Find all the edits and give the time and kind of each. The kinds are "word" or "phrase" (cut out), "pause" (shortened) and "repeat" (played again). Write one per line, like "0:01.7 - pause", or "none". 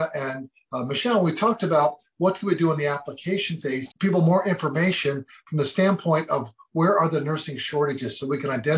0:03.9 - phrase